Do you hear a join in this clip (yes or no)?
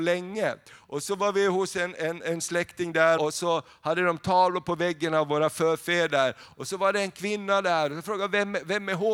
yes